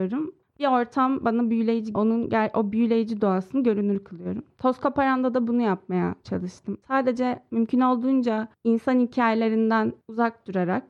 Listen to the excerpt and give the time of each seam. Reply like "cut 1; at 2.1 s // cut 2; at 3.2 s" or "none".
cut 1; at 1.9 s // cut 2; at 6.8 s